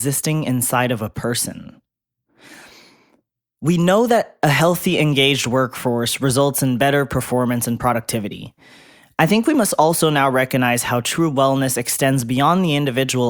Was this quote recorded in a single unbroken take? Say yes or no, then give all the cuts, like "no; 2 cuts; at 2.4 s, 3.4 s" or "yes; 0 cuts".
yes; 0 cuts